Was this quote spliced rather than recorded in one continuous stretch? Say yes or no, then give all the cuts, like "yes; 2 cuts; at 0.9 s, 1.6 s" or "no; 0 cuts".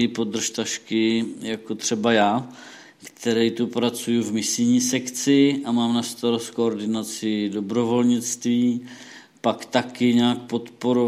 no; 0 cuts